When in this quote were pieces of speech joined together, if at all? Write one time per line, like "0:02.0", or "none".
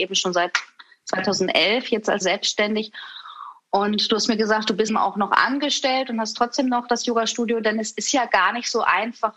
0:02.2
0:04.9